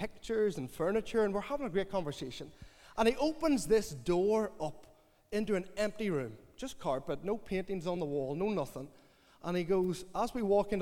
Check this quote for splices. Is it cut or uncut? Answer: uncut